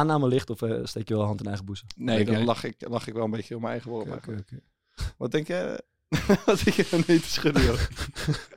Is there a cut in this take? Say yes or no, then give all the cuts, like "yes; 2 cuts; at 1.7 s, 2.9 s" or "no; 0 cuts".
no; 0 cuts